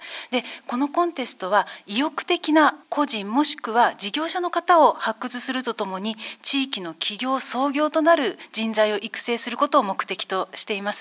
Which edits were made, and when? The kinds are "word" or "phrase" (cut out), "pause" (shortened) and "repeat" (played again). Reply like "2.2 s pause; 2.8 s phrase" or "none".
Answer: 2.8 s pause